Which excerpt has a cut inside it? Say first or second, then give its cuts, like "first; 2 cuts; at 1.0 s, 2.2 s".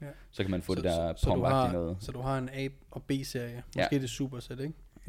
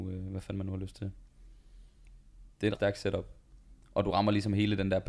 second; 1 cut; at 2.8 s